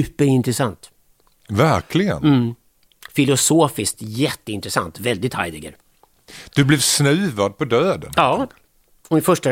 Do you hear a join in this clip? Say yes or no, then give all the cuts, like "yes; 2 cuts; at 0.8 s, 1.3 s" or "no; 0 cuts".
no; 0 cuts